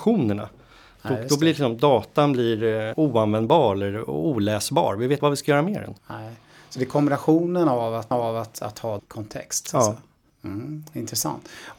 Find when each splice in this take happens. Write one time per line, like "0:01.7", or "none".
0:02.9
0:05.2
0:06.0
0:08.1
0:09.0